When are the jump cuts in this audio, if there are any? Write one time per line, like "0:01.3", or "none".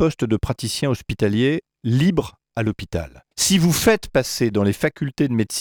0:03.3